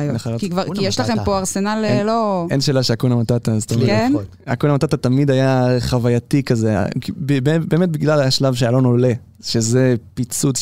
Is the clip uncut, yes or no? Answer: yes